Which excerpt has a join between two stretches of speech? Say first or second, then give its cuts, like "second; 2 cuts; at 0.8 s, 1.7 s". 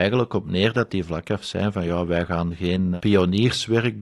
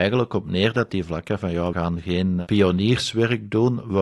second; 2 cuts; at 1.4 s, 1.7 s